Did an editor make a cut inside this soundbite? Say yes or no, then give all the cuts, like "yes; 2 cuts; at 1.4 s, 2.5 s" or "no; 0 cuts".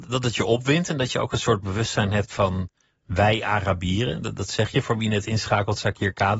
no; 0 cuts